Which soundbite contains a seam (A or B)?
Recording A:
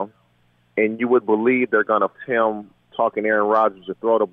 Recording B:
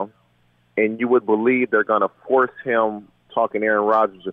A